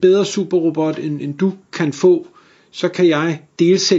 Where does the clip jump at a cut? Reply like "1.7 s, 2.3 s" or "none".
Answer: none